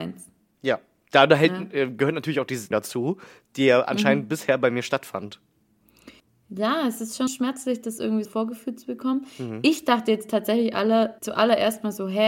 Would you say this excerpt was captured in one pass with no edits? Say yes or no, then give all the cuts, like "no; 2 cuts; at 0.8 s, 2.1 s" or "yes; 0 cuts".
no; 5 cuts; at 2.7 s, 6.2 s, 7.3 s, 8.3 s, 11.2 s